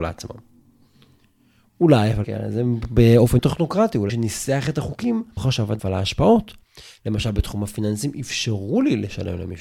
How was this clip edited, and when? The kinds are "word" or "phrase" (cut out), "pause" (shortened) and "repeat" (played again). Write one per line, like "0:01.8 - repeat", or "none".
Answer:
0:02.2 - word
0:03.4 - word
0:04.1 - word
0:05.4 - word
0:05.8 - word